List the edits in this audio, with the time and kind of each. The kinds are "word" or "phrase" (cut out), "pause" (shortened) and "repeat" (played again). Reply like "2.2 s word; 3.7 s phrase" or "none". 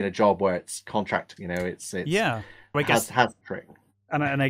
1.4 s phrase; 2.7 s word; 3.4 s word